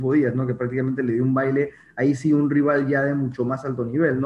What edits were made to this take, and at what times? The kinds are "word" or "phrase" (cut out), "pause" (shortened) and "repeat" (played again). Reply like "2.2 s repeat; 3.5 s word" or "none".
none

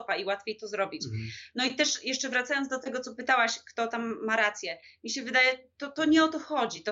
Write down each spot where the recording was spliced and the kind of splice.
none

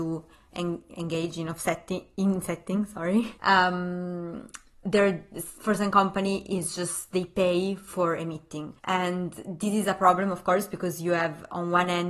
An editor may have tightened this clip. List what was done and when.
3.4 s pause; 8.8 s pause

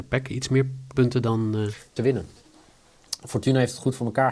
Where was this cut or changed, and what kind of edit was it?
0.9 s phrase; 2.0 s phrase

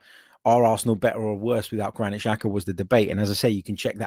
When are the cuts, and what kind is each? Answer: none

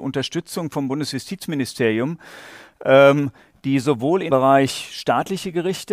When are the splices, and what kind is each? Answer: 4.3 s word

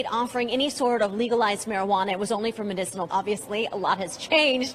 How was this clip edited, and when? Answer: 3.1 s word

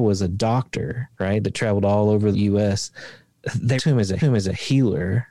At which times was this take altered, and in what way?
1.1 s pause; 2.3 s word; 3.8 s word; 4.2 s repeat

